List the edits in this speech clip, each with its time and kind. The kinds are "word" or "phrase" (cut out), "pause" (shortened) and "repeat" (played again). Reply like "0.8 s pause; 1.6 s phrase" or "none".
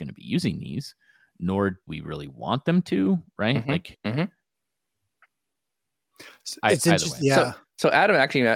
1.9 s word